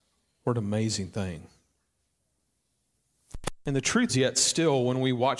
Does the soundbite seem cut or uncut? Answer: cut